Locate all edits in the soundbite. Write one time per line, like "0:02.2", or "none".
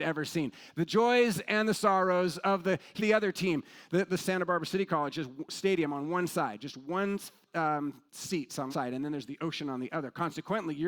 0:03.0
0:04.2
0:08.1
0:08.7